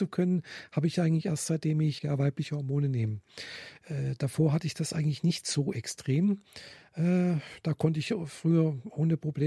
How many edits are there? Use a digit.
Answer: 1